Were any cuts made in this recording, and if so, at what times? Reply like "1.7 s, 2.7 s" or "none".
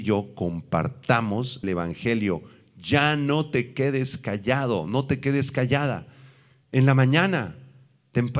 1.6 s